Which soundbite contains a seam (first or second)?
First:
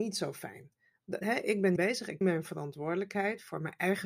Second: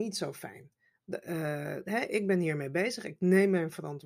first